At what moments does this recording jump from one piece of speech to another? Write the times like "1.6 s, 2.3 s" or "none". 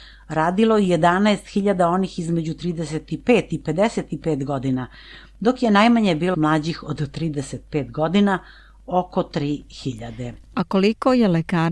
6.3 s